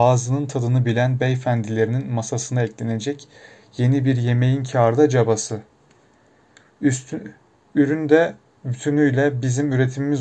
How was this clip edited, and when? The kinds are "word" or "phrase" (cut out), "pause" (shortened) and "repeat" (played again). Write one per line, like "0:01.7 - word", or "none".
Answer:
none